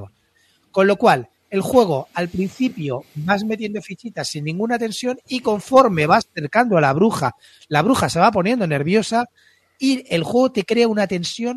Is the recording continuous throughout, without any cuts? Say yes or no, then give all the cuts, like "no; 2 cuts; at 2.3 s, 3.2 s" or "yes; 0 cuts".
yes; 0 cuts